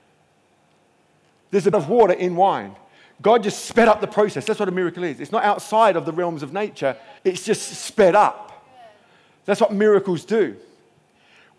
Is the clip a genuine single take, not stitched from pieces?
no; 2 cuts; at 1.7 s, 7.2 s

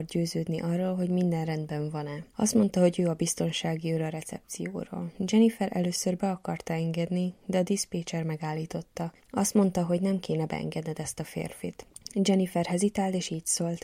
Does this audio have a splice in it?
yes; 1 cut; at 9.2 s

